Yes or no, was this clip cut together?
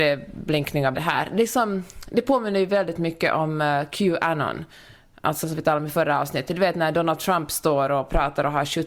yes